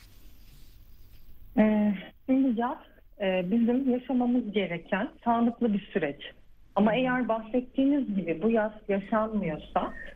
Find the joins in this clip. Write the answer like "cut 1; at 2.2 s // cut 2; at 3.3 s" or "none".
cut 1; at 2.2 s // cut 2; at 5.2 s

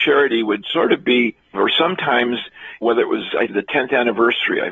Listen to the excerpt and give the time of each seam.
cut 1; at 1.5 s // cut 2; at 2.8 s // cut 3; at 3.5 s

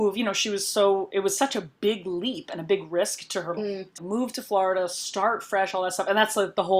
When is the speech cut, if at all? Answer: cut 1; at 3.6 s // cut 2; at 4.0 s

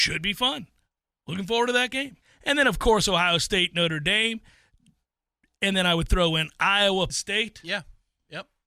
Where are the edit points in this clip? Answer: cut 1; at 2.2 s // cut 2; at 7.1 s

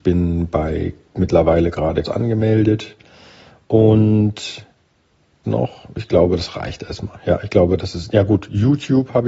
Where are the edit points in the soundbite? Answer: cut 1; at 2.1 s // cut 2; at 5.4 s

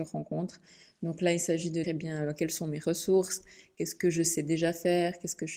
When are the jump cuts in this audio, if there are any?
cut 1; at 1.8 s

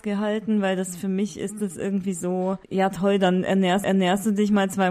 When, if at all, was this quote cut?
cut 1; at 2.6 s // cut 2; at 3.8 s

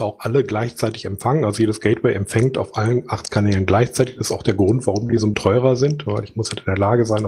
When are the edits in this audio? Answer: cut 1; at 5.3 s

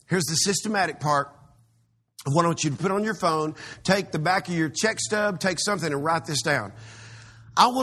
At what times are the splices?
none

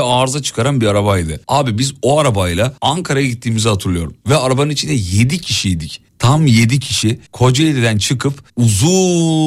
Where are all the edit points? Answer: cut 1; at 1.4 s // cut 2; at 2.8 s // cut 3; at 6.1 s // cut 4; at 7.3 s // cut 5; at 8.5 s

